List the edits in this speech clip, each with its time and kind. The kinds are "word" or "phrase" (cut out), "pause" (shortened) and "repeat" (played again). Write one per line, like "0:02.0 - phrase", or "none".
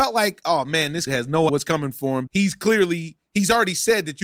0:01.1 - word
0:01.5 - word
0:02.3 - word